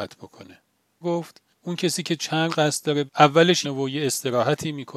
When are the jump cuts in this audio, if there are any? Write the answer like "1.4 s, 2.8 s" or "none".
1.0 s, 1.5 s, 2.5 s, 3.1 s, 3.6 s